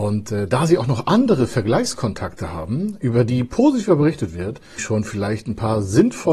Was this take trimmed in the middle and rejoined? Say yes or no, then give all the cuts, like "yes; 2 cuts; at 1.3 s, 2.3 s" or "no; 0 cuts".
yes; 1 cut; at 4.8 s